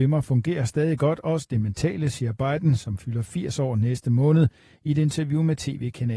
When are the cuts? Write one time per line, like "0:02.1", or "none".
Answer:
none